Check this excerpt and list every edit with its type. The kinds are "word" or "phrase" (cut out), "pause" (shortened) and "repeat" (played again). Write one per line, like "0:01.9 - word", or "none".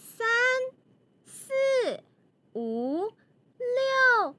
none